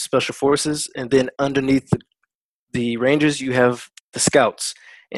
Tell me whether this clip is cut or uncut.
uncut